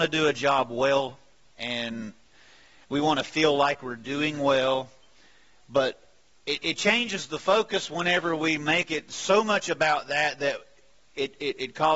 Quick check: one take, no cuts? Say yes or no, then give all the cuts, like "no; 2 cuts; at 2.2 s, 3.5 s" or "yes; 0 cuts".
yes; 0 cuts